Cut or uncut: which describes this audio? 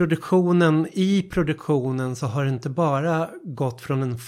uncut